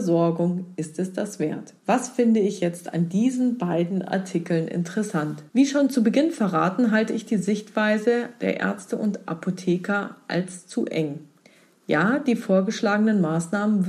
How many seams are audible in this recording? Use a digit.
2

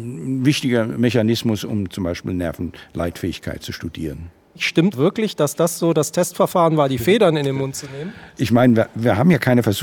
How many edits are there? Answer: 1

